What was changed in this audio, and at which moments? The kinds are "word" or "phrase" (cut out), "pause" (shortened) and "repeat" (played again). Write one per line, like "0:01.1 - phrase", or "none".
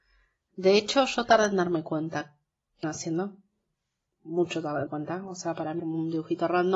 0:02.8 - word
0:04.9 - word
0:05.8 - word

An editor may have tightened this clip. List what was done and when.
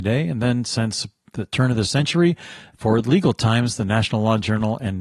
none

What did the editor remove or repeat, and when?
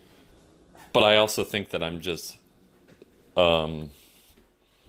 none

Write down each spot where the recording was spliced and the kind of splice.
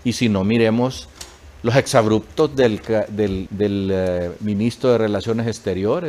0:03.5 - word

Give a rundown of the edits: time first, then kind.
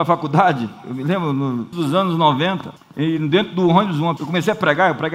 0:01.7 - word
0:02.8 - pause
0:04.2 - word

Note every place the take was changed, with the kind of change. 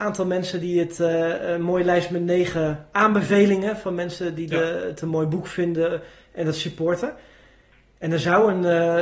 none

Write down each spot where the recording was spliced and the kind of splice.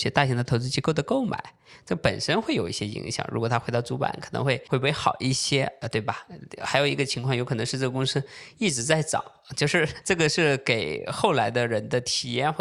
none

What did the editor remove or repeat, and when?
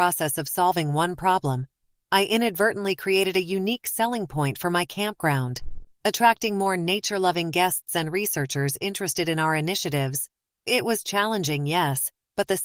none

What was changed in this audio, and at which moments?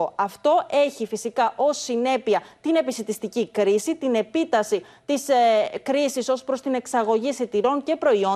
none

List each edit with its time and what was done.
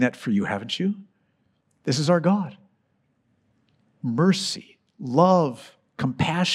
none

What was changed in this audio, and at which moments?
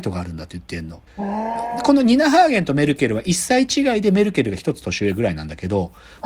0:01.1 - pause

